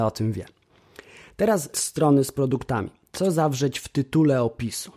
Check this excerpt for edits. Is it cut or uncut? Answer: cut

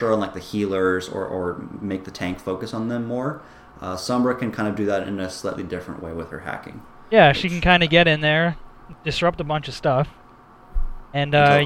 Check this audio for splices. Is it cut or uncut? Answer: uncut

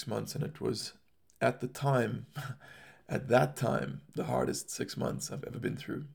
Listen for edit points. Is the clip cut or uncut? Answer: uncut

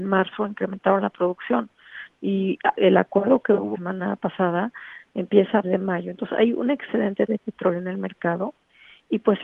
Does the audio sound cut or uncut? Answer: cut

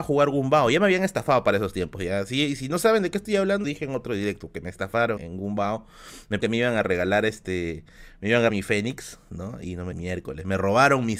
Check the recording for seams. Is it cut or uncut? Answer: cut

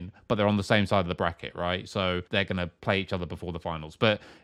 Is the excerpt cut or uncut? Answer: cut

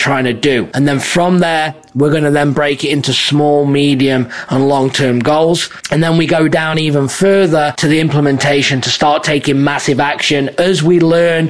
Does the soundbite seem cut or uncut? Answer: uncut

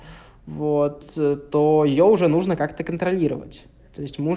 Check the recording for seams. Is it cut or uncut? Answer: uncut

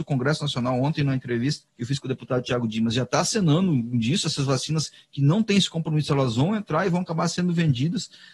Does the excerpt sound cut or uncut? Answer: cut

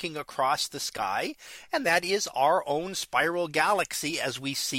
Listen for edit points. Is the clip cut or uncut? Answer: uncut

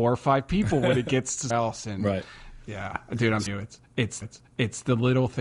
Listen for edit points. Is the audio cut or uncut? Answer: cut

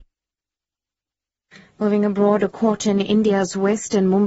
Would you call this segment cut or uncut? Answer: uncut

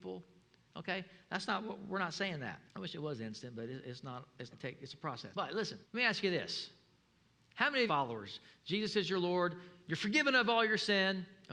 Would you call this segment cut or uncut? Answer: cut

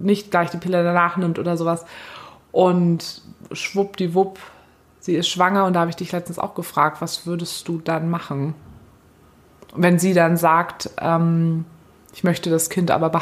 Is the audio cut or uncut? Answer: uncut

